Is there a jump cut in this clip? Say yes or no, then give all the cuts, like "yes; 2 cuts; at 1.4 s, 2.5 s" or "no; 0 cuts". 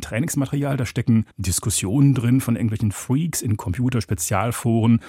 yes; 1 cut; at 1.3 s